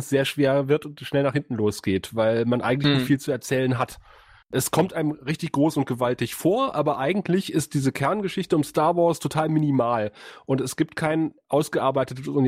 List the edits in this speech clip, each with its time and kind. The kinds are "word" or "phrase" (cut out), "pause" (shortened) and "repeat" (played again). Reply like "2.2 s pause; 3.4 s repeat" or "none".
none